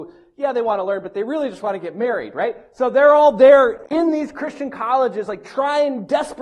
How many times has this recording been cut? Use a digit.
0